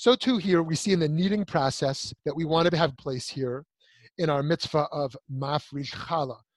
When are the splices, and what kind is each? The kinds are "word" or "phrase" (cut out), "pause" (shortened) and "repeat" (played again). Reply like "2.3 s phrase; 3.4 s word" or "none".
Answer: 2.2 s pause; 3.0 s phrase